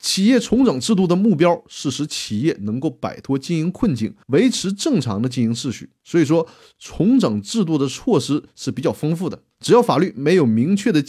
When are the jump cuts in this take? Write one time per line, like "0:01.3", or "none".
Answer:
0:04.2
0:06.0
0:09.5